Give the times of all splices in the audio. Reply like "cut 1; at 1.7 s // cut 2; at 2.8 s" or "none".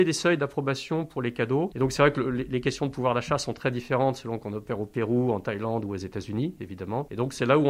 none